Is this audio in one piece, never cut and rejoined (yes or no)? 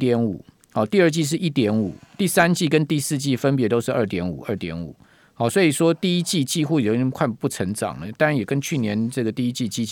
yes